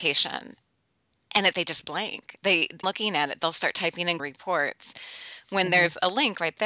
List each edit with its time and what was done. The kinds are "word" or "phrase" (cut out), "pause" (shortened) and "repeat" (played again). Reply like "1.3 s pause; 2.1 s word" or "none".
1.5 s word; 2.8 s word; 4.2 s word